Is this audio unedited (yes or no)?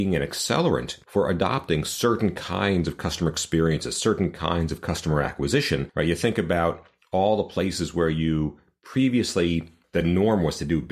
yes